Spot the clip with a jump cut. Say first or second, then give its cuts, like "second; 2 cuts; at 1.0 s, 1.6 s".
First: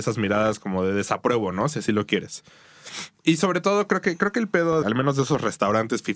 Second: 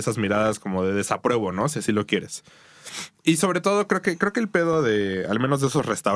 first; 1 cut; at 4.8 s